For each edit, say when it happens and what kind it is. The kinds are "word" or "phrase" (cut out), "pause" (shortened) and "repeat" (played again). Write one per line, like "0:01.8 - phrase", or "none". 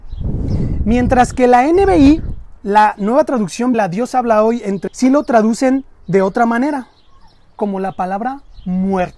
0:03.7 - word
0:04.9 - word